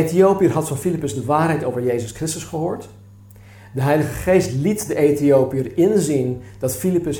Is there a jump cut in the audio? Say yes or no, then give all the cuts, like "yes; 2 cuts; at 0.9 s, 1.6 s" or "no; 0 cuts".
no; 0 cuts